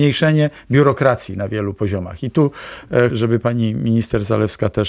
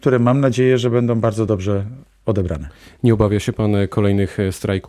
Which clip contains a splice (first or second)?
first